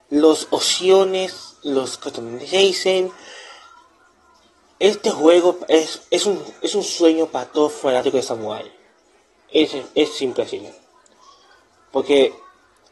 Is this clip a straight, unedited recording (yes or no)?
yes